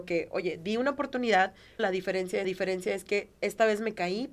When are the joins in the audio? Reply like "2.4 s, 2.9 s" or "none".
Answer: 1.8 s, 2.4 s

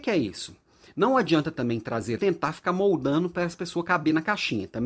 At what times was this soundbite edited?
2.2 s

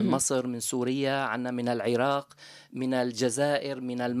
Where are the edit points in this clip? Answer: none

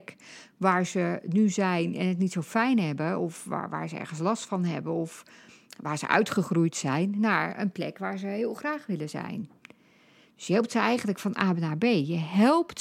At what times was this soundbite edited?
none

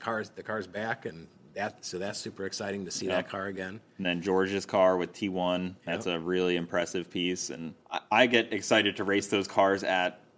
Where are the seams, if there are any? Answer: 5.8 s, 7.8 s

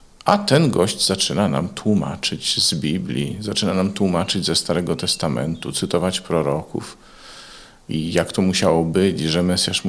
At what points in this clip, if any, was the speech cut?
none

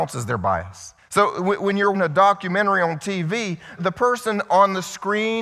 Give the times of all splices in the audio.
1.0 s, 1.9 s, 3.8 s

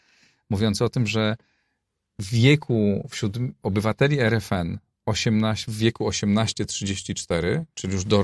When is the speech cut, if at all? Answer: none

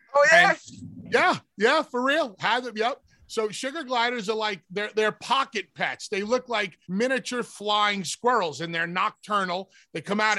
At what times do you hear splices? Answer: 6.8 s

